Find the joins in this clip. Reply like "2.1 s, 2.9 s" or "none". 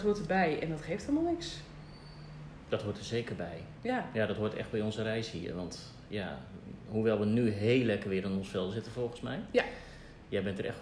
none